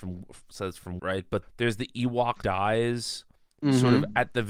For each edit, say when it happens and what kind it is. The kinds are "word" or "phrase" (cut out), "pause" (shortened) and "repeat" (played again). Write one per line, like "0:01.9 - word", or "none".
0:01.0 - word
0:01.4 - word
0:02.4 - word